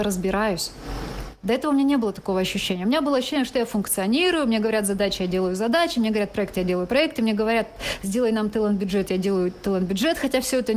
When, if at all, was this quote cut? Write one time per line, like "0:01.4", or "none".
none